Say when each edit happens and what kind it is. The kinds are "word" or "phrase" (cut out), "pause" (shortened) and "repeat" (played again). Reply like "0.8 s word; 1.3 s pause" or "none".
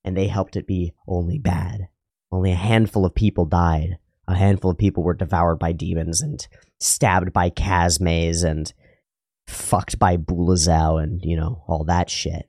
2.1 s pause